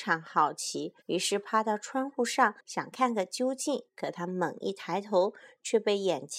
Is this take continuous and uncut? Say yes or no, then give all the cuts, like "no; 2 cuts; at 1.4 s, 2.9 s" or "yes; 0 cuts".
no; 3 cuts; at 1.0 s, 2.6 s, 3.9 s